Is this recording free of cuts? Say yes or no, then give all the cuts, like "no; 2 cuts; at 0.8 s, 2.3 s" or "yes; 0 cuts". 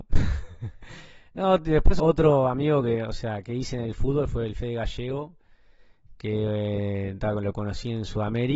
no; 1 cut; at 2.0 s